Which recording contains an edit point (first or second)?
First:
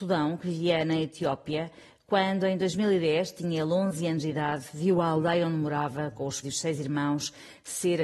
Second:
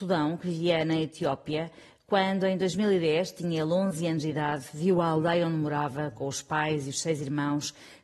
first